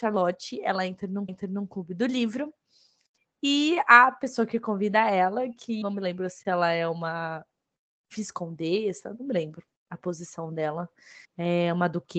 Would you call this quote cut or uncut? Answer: cut